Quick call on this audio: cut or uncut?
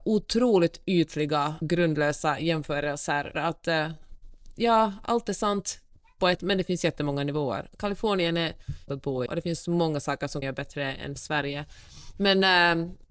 cut